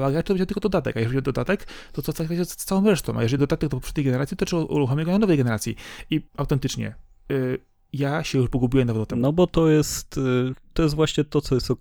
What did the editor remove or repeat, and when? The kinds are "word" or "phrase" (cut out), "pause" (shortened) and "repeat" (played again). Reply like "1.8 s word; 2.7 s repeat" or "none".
3.4 s word; 6.3 s pause

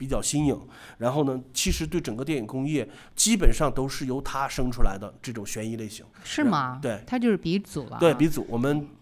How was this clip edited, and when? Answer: 6.1 s pause

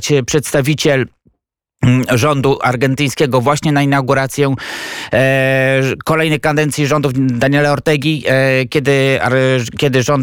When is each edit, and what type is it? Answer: none

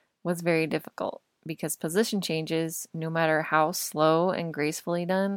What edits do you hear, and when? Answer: none

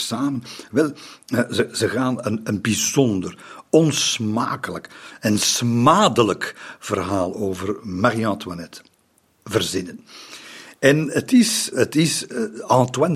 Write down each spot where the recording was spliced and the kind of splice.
11.7 s word

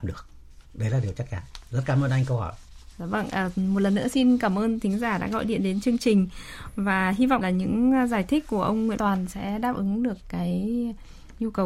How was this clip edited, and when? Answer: 7.4 s word; 9.0 s word

